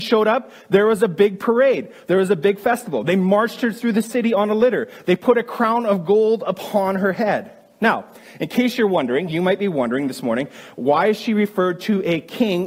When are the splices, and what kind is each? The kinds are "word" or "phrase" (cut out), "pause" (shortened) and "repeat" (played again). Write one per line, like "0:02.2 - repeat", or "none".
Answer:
none